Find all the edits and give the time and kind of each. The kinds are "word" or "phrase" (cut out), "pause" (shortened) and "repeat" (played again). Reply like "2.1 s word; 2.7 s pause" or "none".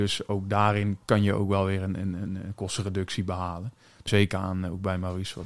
1.0 s pause; 4.1 s phrase